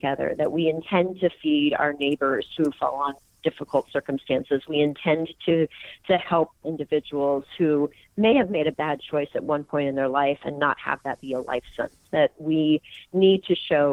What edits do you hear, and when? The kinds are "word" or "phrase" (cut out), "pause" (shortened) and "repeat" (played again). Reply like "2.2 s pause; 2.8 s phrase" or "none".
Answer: 12.1 s pause